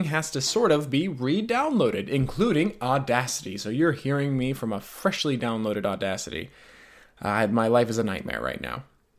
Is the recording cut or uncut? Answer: uncut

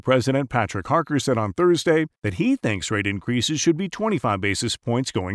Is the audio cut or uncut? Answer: cut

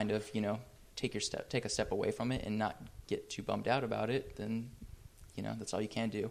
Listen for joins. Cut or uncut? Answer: uncut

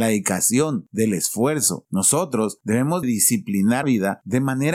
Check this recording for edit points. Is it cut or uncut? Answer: cut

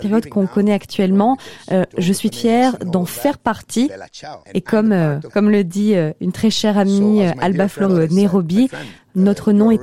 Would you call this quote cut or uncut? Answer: cut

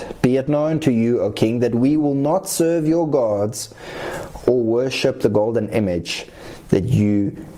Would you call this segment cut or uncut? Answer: uncut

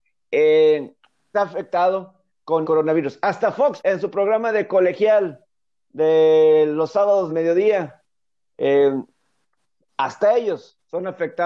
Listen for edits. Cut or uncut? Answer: cut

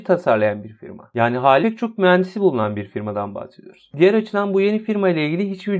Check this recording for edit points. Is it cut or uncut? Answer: cut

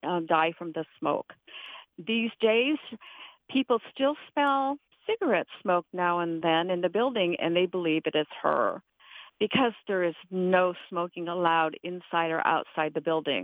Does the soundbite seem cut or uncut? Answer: uncut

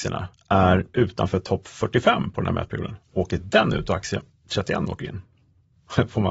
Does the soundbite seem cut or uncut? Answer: uncut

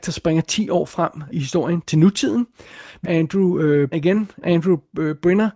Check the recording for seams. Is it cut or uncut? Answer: cut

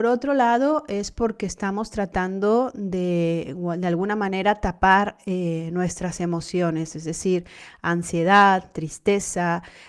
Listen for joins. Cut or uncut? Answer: uncut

